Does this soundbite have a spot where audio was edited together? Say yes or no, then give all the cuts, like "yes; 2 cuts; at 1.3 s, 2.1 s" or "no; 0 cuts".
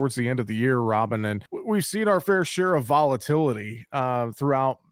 yes; 1 cut; at 1.5 s